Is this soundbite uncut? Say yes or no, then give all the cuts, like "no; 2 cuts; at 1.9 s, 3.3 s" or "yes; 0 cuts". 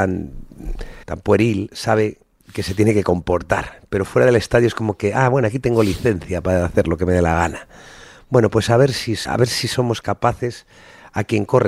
no; 2 cuts; at 1.0 s, 9.3 s